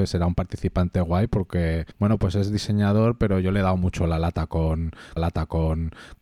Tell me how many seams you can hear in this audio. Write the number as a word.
two